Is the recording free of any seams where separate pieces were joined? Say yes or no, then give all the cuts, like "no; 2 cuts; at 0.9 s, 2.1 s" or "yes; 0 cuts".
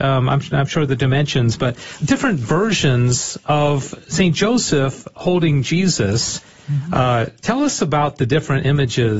no; 1 cut; at 2.0 s